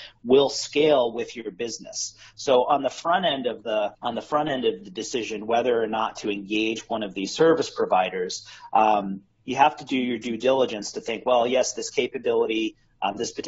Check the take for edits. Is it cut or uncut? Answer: cut